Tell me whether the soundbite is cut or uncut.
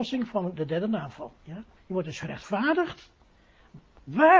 cut